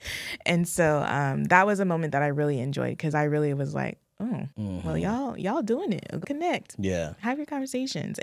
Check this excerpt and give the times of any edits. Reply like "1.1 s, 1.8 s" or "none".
4.5 s, 6.2 s